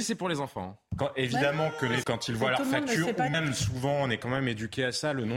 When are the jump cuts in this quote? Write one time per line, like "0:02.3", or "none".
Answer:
0:02.0
0:03.3